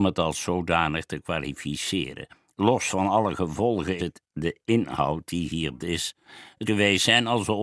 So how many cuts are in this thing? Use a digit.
4